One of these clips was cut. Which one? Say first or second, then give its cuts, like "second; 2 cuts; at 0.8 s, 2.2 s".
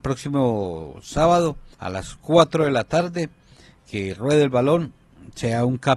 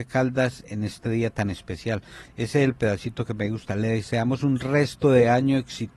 first; 1 cut; at 1.7 s